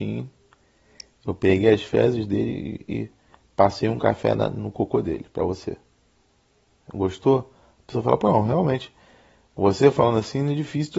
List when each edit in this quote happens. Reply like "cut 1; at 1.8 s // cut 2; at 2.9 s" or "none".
none